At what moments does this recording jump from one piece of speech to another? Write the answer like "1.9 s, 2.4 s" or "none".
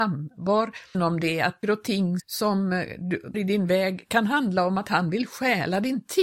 0.9 s, 1.6 s, 2.2 s, 3.3 s